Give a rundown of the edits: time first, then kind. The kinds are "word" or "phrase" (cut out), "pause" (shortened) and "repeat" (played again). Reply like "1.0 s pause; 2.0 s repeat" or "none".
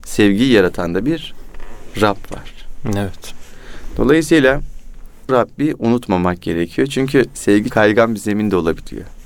5.3 s word; 7.7 s word